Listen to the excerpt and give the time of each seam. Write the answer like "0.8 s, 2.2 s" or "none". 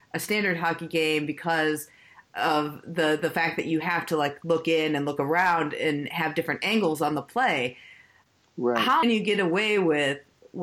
9.0 s